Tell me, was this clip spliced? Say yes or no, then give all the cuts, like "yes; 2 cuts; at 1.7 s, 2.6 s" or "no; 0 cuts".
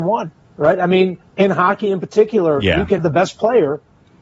yes; 2 cuts; at 1.2 s, 3.0 s